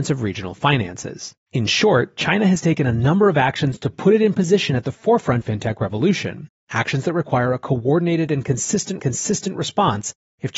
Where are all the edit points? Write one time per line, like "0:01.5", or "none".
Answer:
0:01.4
0:05.4
0:09.0